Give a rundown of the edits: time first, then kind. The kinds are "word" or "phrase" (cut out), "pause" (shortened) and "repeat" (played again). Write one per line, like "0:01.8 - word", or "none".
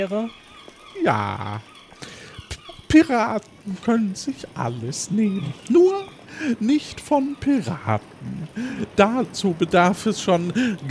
none

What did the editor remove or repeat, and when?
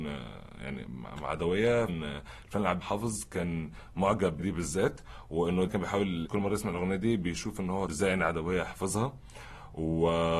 0:01.9 - word
0:02.8 - word
0:04.4 - word
0:05.7 - word
0:06.2 - word
0:07.9 - word

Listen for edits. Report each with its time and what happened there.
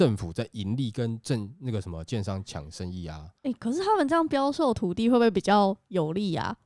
0:03.4 - pause

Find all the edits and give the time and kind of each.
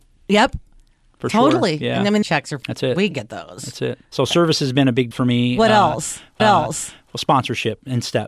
0:02.2 - phrase
0:02.6 - word
0:03.1 - word
0:04.0 - pause
0:05.1 - word
0:06.4 - repeat

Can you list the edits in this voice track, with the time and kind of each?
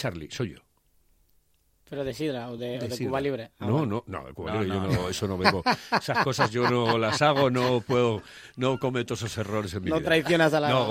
none

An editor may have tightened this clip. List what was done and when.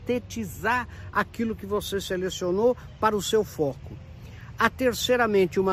none

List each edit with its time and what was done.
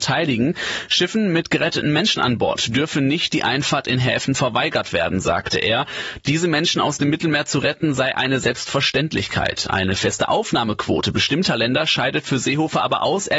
none

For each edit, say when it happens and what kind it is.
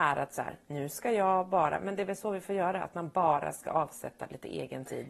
none

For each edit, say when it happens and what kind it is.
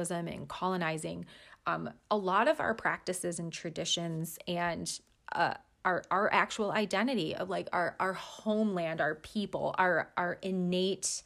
none

